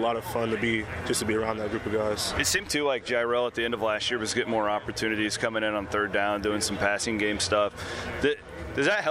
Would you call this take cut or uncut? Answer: uncut